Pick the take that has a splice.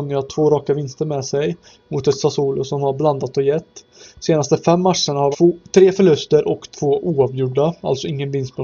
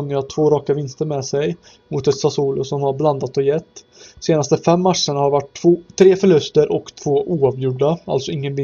first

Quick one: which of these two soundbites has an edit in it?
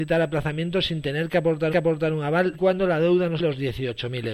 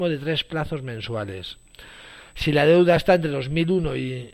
first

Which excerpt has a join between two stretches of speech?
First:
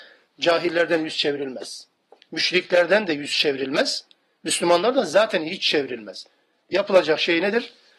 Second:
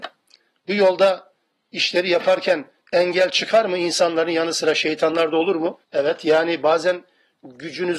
second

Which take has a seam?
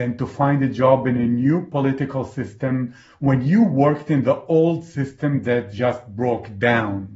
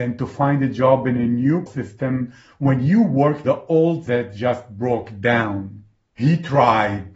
second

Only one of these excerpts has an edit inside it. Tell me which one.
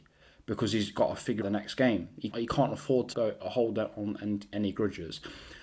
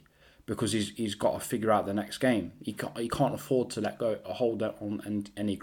first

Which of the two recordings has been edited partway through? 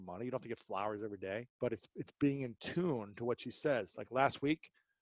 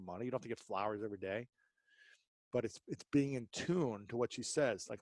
first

